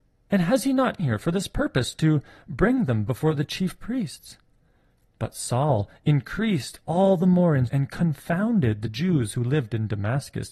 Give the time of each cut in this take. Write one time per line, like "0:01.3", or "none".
0:01.0
0:03.1
0:07.7